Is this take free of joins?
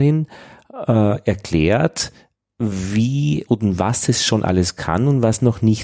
yes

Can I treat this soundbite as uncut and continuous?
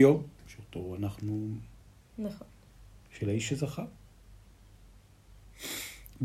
yes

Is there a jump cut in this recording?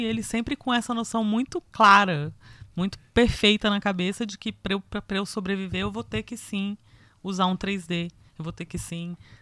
no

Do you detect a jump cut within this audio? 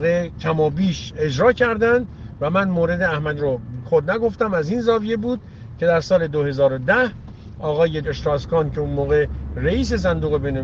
yes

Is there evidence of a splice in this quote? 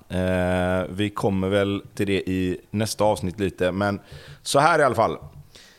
yes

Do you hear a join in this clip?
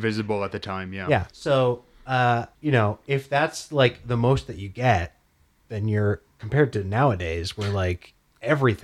yes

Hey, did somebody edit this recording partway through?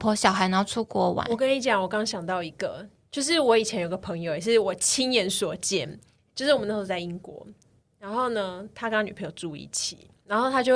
no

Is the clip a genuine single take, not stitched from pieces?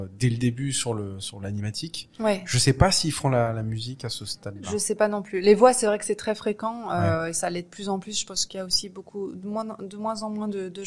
yes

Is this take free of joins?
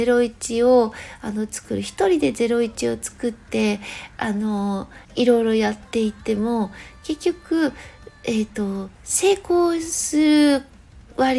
no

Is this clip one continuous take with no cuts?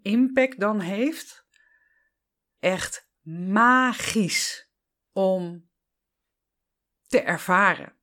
no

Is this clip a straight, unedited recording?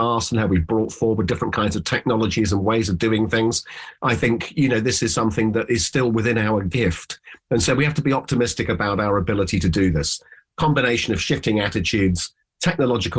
yes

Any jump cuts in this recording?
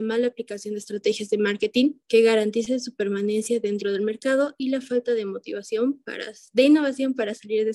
yes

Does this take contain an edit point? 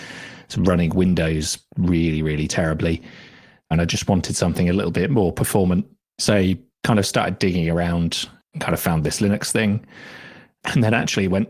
no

